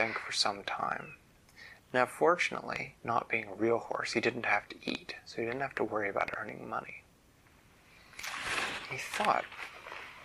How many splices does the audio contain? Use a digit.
1